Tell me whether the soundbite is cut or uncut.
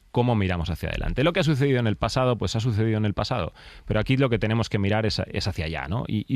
uncut